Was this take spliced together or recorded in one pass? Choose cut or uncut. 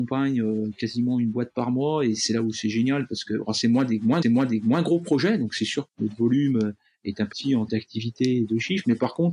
cut